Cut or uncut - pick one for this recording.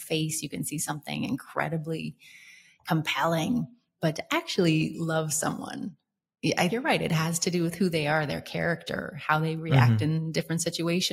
cut